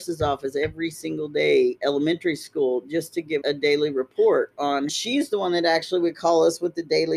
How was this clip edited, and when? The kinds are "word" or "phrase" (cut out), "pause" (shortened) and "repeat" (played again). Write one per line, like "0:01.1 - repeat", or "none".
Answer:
0:01.8 - word
0:03.4 - word
0:04.9 - phrase